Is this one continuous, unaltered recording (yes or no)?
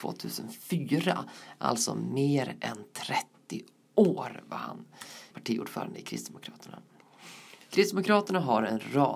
no